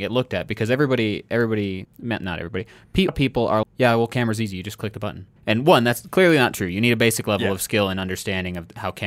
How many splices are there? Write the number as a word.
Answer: four